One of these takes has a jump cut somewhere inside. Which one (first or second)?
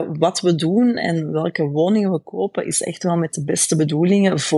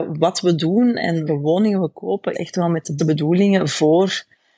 second